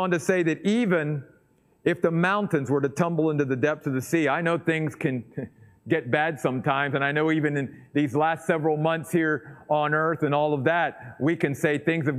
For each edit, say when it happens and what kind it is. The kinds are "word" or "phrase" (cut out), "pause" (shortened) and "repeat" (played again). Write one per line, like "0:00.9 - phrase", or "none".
none

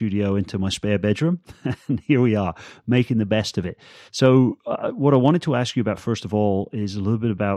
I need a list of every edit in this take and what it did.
0:04.1 - pause

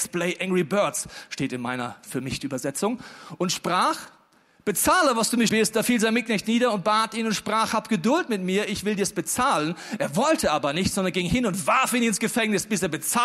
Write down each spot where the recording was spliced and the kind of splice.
0:05.5 - word

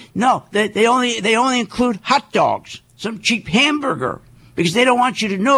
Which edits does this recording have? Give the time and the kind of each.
0:02.9 - pause

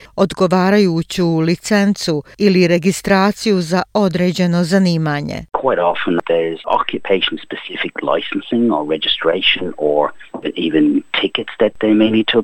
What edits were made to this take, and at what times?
none

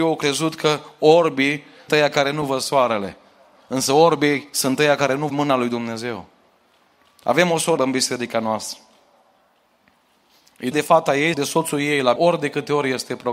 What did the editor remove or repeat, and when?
0:01.9 - word
0:05.3 - word
0:07.8 - word
0:10.7 - word
0:11.3 - word
0:12.2 - word

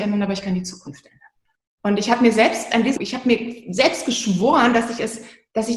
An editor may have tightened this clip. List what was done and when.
0:01.5 - pause
0:03.0 - word

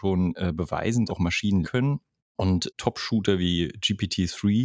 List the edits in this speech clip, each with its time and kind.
0:01.1 - word
0:01.6 - word
0:02.7 - word

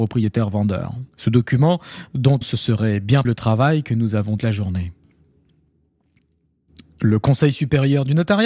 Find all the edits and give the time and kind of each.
0:01.1 - pause
0:02.4 - word
0:03.2 - phrase
0:04.4 - phrase

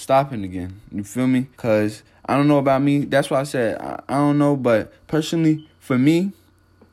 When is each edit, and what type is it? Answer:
0:01.5 - pause

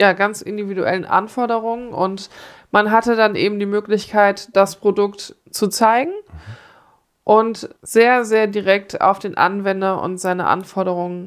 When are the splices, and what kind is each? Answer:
0:05.4 - pause
0:07.8 - pause

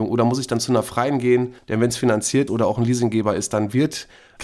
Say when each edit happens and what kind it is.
0:02.5 - word

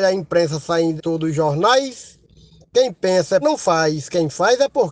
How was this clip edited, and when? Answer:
0:01.0 - word
0:03.4 - word

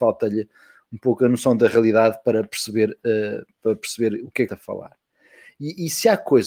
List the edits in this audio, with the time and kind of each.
0:04.5 - phrase

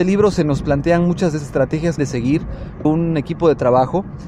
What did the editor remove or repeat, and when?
0:01.4 - word
0:02.0 - phrase
0:02.8 - phrase

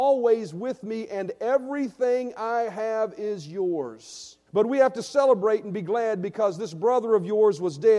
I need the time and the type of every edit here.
0:04.5 - pause

